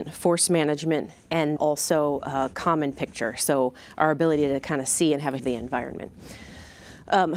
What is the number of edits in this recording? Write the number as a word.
two